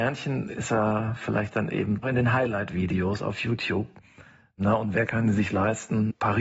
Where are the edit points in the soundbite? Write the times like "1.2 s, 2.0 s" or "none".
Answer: 2.0 s

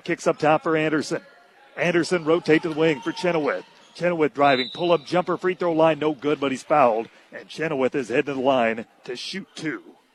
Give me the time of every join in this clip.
none

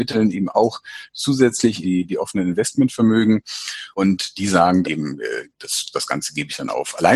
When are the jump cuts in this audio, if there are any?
1.8 s, 3.9 s, 4.8 s

